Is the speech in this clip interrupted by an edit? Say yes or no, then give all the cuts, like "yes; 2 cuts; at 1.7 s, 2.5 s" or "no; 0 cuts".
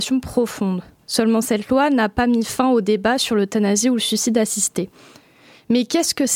no; 0 cuts